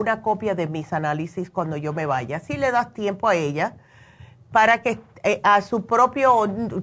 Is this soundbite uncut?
yes; 0 cuts

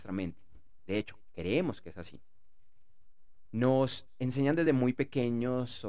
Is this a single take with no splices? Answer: yes; 0 cuts

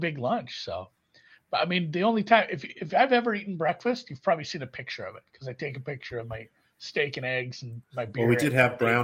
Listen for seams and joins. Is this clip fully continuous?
yes; 0 cuts

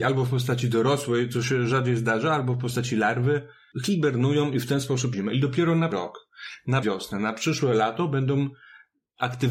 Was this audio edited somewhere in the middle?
yes; 3 cuts; at 5.1 s, 5.9 s, 6.8 s

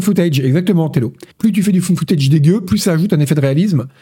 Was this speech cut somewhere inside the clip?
yes; 1 cut; at 1.3 s

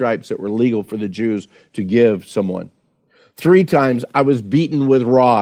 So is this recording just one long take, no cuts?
yes; 0 cuts

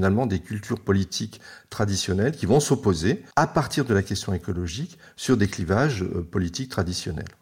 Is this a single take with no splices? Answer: no; 1 cut; at 3.3 s

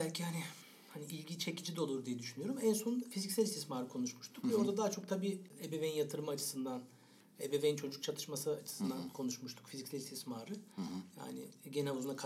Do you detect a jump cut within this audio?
no; 0 cuts

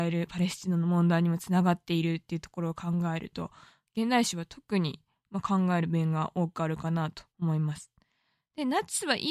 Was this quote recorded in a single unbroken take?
no; 1 cut; at 7.3 s

